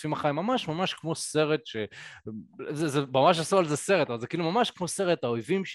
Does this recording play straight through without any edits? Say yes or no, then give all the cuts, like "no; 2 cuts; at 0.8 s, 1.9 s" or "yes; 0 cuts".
yes; 0 cuts